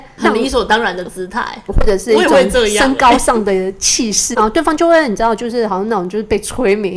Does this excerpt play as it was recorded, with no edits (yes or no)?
no